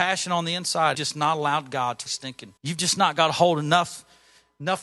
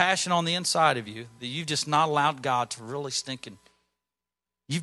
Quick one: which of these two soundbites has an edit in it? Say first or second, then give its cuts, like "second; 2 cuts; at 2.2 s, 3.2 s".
first; 3 cuts; at 0.9 s, 2.1 s, 2.6 s